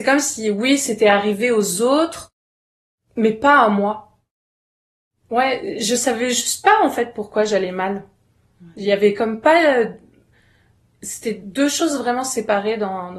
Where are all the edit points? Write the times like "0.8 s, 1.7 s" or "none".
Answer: none